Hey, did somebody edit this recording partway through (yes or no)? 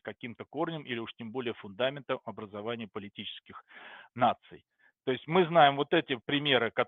no